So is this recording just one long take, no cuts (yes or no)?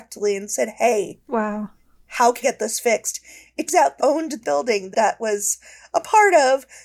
no